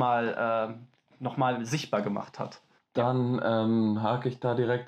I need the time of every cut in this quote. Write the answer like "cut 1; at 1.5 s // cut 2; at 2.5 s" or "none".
cut 1; at 2.8 s

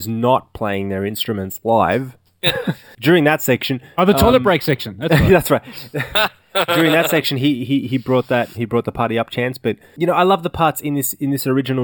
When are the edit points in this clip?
cut 1; at 8.5 s

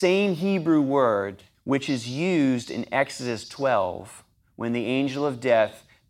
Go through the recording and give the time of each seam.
cut 1; at 1.5 s

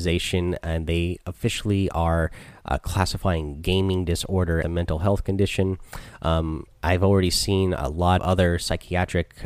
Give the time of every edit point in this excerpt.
cut 1; at 4.6 s // cut 2; at 8.2 s

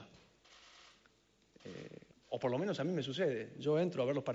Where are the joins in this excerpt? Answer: cut 1; at 2.1 s

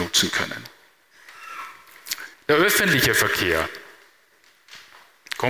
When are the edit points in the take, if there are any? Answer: cut 1; at 2.3 s

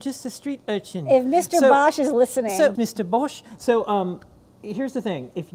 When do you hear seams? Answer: cut 1; at 2.7 s

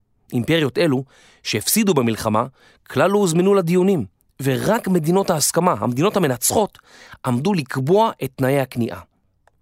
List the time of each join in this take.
none

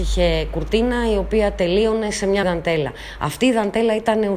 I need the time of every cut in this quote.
cut 1; at 2.4 s

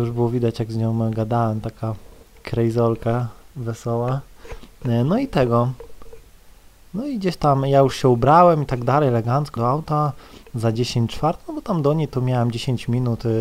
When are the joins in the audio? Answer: cut 1; at 9.6 s

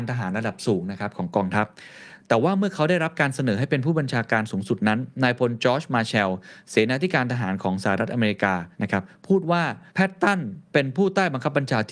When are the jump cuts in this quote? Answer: cut 1; at 8.7 s // cut 2; at 9.9 s

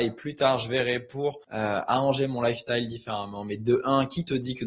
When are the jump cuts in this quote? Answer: cut 1; at 1.4 s

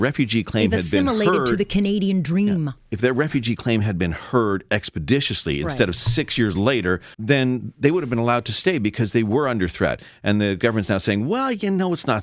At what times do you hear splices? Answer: cut 1; at 7.1 s

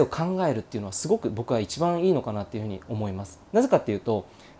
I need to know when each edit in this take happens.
cut 1; at 3.5 s

